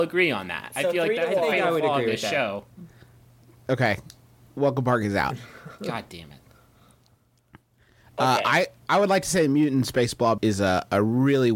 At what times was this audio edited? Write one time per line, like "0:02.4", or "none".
0:10.4